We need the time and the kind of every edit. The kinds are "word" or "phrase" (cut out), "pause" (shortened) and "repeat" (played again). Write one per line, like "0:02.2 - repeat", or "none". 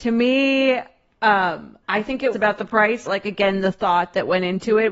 0:01.8 - pause
0:02.3 - phrase
0:03.1 - phrase